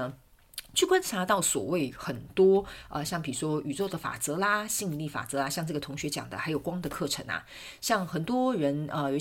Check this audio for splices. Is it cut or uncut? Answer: uncut